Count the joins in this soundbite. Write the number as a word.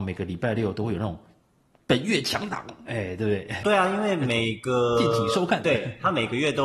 one